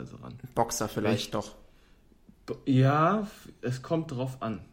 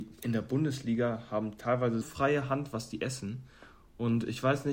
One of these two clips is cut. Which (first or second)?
second